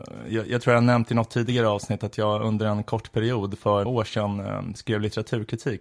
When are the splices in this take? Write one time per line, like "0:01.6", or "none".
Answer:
0:03.9